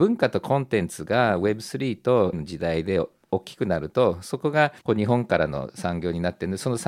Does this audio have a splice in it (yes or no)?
yes